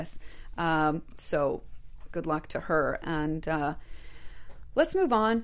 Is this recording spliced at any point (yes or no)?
yes